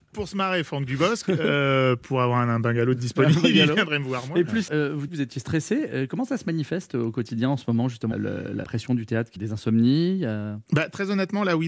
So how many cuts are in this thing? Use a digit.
6